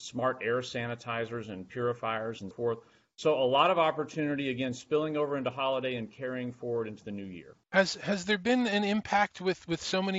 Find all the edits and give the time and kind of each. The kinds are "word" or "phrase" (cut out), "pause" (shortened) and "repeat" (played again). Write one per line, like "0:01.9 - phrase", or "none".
0:02.5 - word
0:07.6 - pause